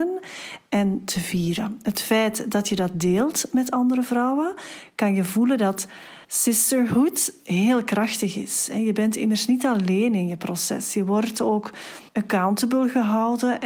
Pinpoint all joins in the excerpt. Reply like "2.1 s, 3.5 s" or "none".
6.2 s, 12.1 s